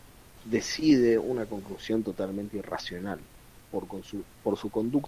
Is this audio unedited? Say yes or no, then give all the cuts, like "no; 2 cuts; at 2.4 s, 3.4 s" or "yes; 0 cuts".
yes; 0 cuts